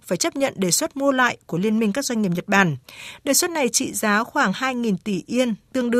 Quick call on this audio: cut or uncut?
uncut